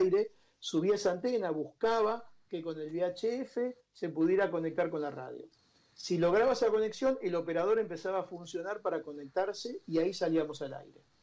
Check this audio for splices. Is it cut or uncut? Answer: uncut